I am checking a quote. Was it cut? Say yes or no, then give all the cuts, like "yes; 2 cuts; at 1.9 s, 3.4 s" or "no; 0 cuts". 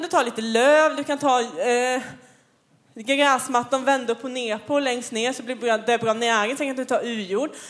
no; 0 cuts